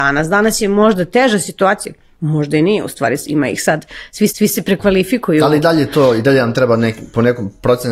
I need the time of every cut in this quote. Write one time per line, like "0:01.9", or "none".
0:04.3